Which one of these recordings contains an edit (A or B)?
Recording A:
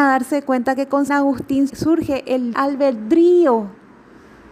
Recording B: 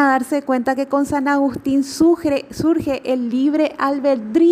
A